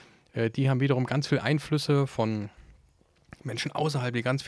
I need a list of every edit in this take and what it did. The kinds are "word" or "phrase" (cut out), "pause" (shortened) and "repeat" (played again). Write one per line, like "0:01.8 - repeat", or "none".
none